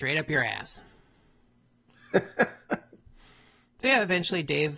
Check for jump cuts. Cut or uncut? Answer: uncut